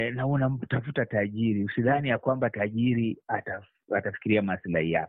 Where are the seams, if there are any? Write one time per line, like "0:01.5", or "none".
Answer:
none